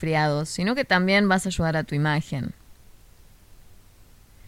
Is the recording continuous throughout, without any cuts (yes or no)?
yes